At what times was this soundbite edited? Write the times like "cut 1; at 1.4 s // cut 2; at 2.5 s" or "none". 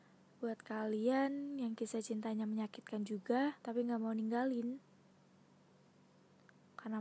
cut 1; at 3.6 s